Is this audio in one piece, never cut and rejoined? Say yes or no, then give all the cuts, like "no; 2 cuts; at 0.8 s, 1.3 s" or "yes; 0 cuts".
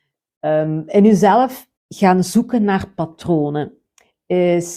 no; 1 cut; at 1.8 s